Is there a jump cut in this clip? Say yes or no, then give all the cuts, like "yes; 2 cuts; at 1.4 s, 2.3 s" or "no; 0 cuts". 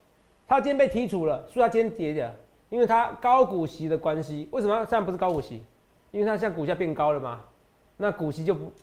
no; 0 cuts